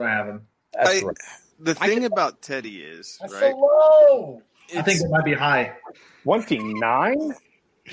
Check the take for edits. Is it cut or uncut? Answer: uncut